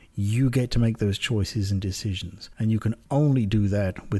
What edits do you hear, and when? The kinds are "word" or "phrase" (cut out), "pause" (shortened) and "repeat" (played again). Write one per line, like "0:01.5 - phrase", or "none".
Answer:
0:02.5 - pause